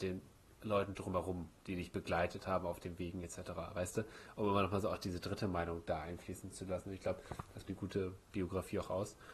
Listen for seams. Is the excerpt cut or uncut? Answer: cut